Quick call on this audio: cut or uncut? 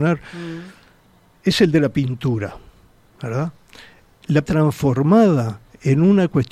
cut